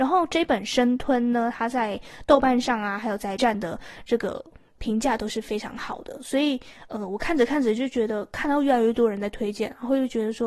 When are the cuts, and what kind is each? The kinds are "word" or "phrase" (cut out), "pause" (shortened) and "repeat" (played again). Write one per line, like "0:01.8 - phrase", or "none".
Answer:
0:03.4 - word